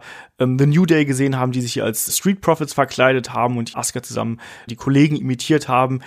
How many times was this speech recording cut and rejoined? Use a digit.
3